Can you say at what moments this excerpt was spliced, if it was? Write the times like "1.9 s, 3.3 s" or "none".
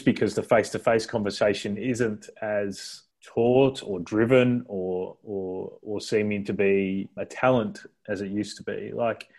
3.1 s, 7.2 s